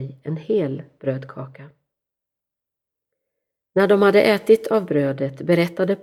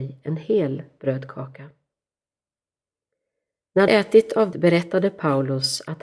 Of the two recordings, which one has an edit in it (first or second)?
second